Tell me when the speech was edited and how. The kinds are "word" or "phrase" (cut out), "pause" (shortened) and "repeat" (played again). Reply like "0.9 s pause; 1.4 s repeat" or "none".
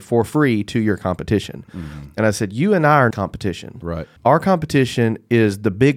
3.1 s word; 4.2 s pause